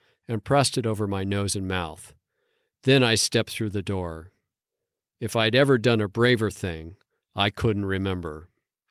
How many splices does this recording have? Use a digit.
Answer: 0